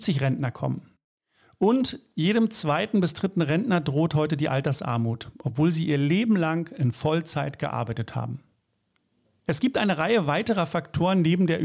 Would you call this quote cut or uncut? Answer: uncut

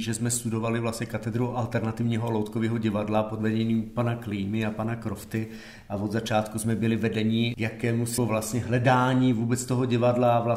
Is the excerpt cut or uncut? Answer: cut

